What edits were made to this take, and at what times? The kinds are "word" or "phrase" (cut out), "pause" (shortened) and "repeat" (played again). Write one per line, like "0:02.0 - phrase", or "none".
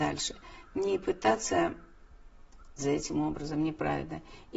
0:02.8 - word